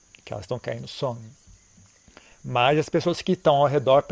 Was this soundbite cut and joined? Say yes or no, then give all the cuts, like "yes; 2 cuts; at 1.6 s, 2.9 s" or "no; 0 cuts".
yes; 1 cut; at 2.3 s